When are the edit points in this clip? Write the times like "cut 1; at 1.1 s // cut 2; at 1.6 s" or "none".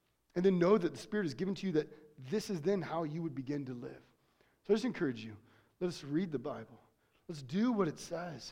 none